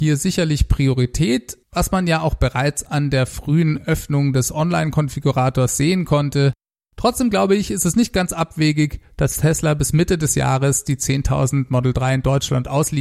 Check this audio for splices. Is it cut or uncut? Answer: cut